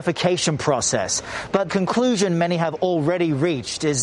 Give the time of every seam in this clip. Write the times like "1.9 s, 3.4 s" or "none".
1.7 s